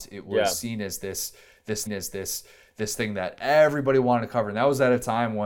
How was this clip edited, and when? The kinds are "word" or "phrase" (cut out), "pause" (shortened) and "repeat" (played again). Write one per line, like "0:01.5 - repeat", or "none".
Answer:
0:01.9 - repeat